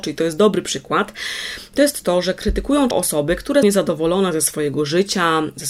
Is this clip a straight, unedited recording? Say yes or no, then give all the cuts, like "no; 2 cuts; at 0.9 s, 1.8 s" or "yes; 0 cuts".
no; 2 cuts; at 2.9 s, 3.6 s